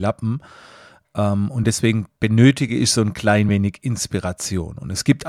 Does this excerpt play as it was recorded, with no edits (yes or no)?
yes